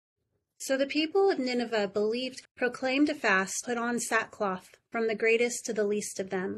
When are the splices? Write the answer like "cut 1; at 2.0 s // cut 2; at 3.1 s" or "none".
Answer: cut 1; at 2.4 s // cut 2; at 3.6 s